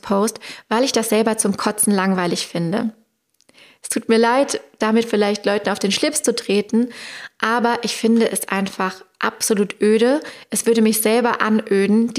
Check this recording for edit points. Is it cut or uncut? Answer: uncut